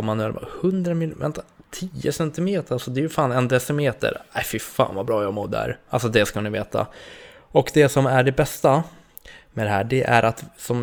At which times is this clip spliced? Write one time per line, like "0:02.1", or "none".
none